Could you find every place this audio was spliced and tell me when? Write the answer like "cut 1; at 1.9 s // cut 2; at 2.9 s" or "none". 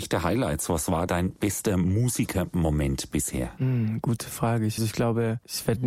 cut 1; at 1.1 s // cut 2; at 4.8 s